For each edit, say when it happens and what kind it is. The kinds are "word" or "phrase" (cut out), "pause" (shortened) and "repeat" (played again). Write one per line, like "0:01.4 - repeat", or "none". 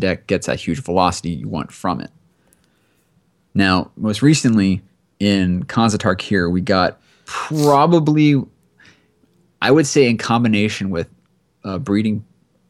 none